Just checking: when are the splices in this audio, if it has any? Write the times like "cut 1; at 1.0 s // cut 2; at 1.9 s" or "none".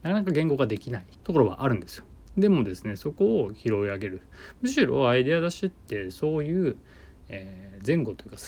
cut 1; at 1.1 s